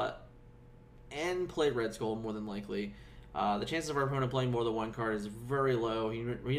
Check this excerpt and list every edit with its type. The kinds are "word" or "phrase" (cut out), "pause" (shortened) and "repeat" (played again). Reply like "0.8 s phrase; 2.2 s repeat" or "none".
none